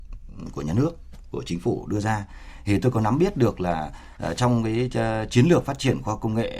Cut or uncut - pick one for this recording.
uncut